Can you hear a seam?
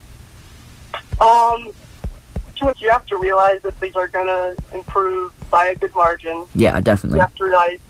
yes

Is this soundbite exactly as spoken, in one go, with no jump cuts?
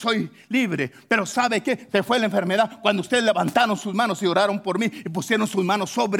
yes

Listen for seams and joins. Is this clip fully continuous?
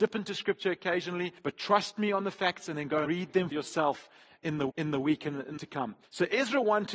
no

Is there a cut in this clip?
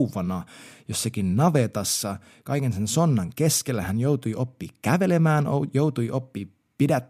no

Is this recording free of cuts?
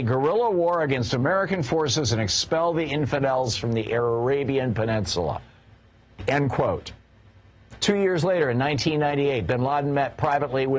yes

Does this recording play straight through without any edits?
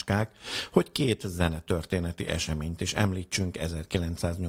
yes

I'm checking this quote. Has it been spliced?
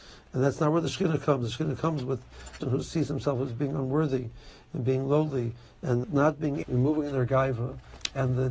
yes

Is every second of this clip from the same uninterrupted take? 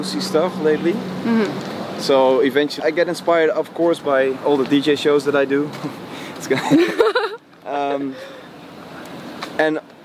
no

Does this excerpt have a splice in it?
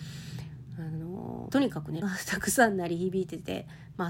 yes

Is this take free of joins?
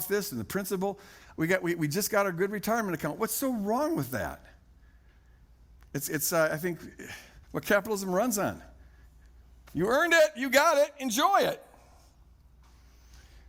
no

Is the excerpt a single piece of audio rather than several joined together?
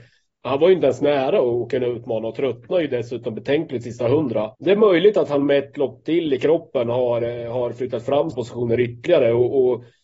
no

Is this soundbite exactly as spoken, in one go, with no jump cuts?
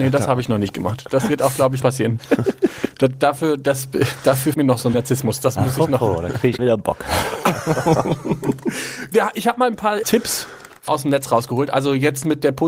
no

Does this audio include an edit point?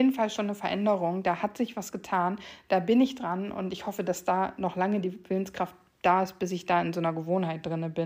no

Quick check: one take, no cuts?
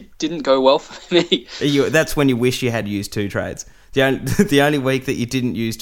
yes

